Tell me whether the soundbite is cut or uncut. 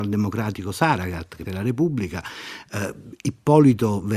cut